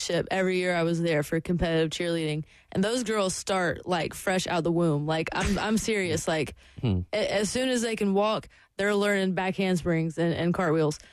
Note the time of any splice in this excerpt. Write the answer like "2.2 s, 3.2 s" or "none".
none